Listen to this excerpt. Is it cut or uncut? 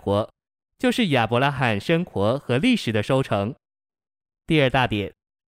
uncut